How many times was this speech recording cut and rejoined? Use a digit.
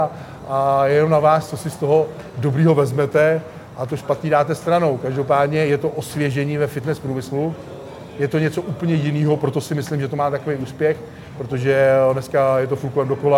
0